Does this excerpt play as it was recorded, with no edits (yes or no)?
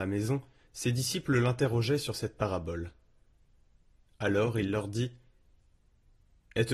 yes